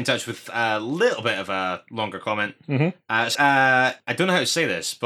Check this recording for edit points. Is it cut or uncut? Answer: cut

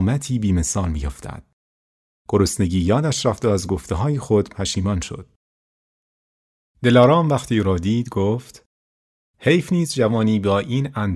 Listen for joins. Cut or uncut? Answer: uncut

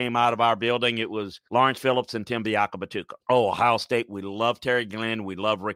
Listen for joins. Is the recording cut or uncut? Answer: cut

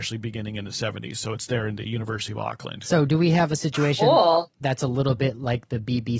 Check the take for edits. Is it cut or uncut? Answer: uncut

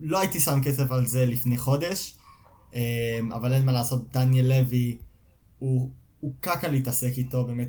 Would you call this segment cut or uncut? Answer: uncut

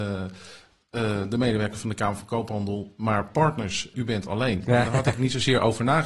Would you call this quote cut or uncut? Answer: cut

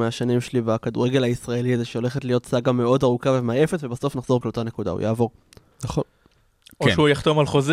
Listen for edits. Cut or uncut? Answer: cut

